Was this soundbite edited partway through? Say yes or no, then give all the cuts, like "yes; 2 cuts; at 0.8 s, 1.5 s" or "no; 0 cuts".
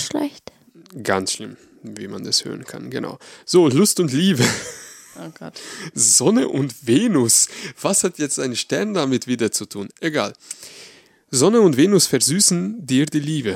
no; 0 cuts